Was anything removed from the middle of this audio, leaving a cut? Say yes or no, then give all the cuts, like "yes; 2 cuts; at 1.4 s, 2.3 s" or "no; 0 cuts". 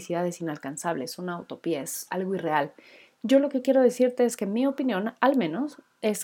no; 0 cuts